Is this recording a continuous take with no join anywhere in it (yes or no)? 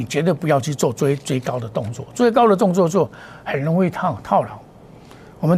yes